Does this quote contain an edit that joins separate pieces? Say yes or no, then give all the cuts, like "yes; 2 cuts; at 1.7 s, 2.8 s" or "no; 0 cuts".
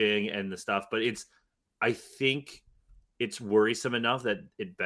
no; 0 cuts